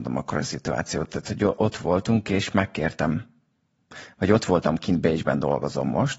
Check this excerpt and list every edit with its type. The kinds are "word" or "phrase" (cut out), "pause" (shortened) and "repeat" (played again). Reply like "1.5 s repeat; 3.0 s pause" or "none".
none